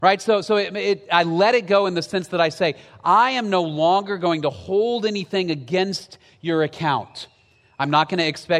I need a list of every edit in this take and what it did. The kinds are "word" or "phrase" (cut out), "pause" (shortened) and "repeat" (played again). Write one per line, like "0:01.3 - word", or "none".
none